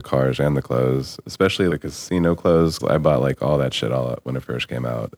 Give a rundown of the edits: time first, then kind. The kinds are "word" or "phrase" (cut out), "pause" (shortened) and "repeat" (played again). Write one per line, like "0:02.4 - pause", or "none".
0:01.2 - word
0:01.7 - word
0:02.8 - word